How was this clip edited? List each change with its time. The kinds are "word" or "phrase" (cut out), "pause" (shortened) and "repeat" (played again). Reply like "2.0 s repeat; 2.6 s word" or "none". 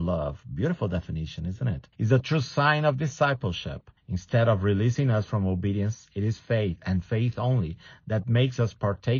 1.9 s pause; 4.0 s pause